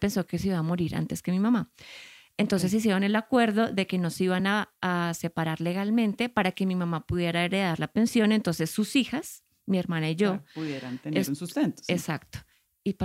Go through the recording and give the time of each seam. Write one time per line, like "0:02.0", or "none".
none

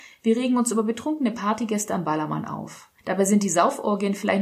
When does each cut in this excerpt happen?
0:03.0

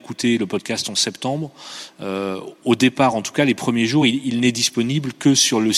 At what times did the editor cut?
none

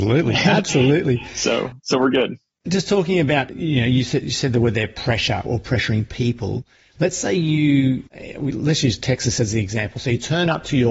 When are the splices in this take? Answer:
none

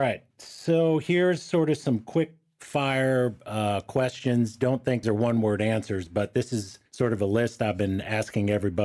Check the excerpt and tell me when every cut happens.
0:05.0
0:06.9

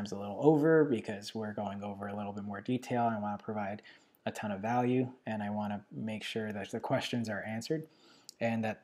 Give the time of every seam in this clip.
none

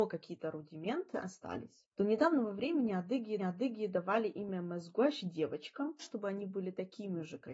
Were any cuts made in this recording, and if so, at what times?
0:01.9
0:03.4
0:06.0

